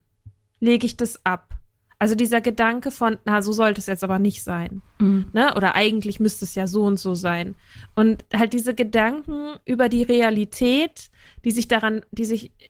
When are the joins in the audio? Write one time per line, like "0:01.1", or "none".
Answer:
none